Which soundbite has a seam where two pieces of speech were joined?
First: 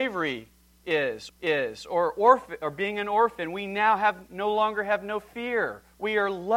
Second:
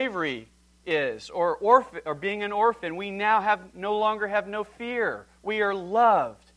first; 1 cut; at 1.3 s

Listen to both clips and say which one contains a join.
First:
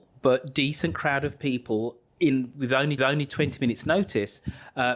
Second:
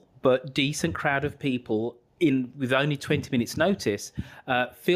first; 1 cut; at 3.0 s

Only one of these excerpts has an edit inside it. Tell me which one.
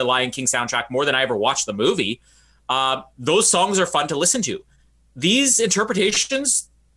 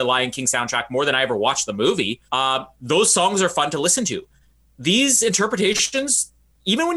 second; 1 cut; at 2.3 s

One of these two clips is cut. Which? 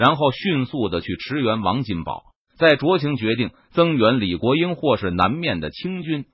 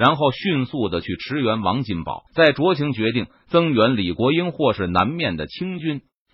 second; 1 cut; at 2.3 s

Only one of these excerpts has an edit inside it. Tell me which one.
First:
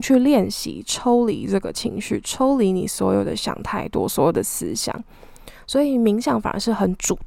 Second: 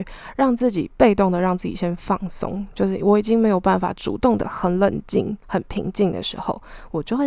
second; 1 cut; at 5.4 s

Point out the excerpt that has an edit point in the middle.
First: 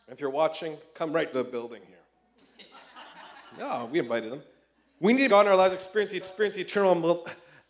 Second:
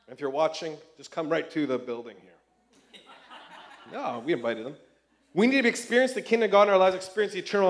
first; 4 cuts; at 0.9 s, 1.3 s, 5.3 s, 6.2 s

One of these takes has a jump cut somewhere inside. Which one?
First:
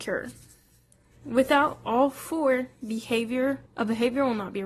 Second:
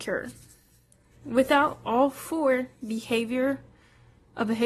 first; 1 cut; at 3.7 s

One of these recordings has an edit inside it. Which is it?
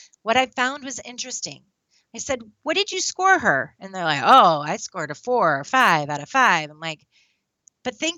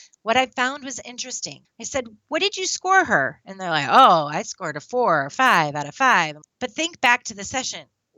second; 2 cuts; at 1.6 s, 6.4 s

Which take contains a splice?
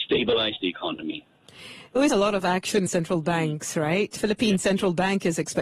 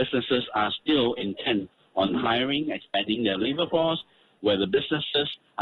first; 3 cuts; at 2.1 s, 2.9 s, 4.2 s

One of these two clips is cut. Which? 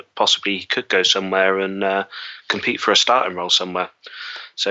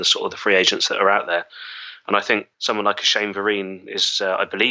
second; 1 cut; at 2.5 s

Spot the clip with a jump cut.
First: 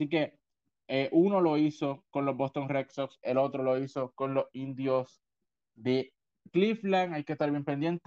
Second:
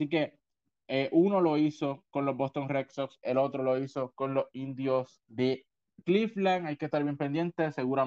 second; 1 cut; at 5.2 s

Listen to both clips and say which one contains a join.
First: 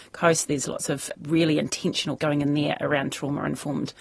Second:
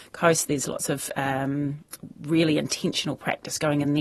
first; 2 cuts; at 1.1 s, 2.2 s

